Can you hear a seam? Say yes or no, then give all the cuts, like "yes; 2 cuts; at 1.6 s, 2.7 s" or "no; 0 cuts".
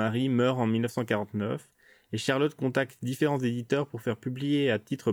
no; 0 cuts